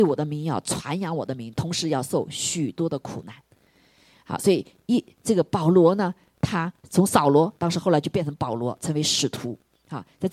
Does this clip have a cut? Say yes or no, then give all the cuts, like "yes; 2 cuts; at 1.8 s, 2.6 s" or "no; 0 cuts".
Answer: yes; 2 cuts; at 6.8 s, 7.6 s